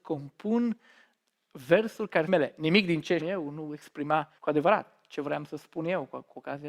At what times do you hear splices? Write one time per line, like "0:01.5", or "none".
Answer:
0:02.3
0:03.2
0:04.4